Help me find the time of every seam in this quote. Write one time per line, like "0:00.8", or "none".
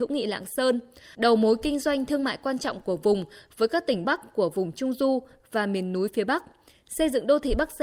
0:04.0